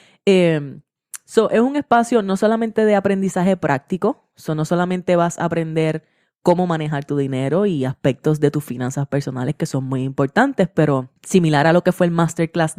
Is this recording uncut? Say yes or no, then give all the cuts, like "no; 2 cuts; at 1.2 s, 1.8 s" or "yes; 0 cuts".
no; 1 cut; at 11.2 s